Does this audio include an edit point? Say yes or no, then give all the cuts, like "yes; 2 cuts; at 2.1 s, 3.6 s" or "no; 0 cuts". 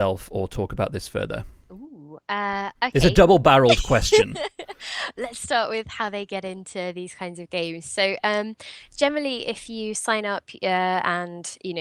no; 0 cuts